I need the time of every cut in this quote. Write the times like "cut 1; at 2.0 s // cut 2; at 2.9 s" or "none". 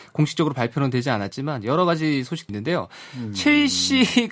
cut 1; at 2.5 s

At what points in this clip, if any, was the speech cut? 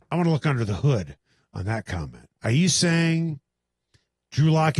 cut 1; at 2.4 s

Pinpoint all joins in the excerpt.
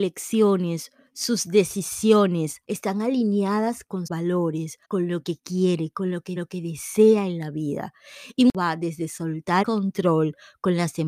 cut 1; at 2.6 s // cut 2; at 4.1 s // cut 3; at 4.8 s // cut 4; at 6.4 s // cut 5; at 9.6 s

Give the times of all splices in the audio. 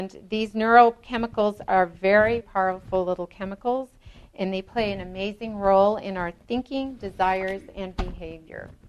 cut 1; at 2.4 s

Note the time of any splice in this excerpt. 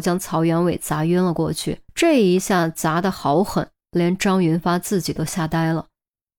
cut 1; at 1.9 s

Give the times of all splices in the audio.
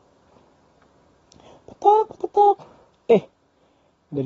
cut 1; at 2.2 s

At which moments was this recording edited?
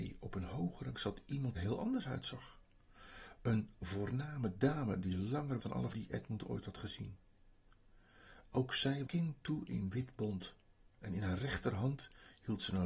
cut 1; at 0.9 s // cut 2; at 1.5 s // cut 3; at 5.6 s // cut 4; at 5.9 s // cut 5; at 9.1 s // cut 6; at 10.9 s

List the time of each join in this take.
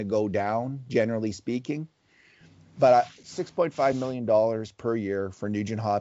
none

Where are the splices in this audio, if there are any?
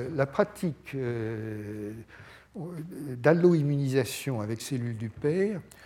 cut 1; at 4.6 s

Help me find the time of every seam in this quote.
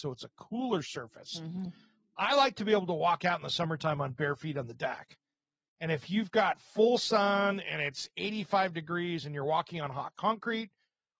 none

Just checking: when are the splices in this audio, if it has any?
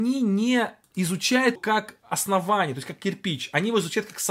cut 1; at 1.6 s

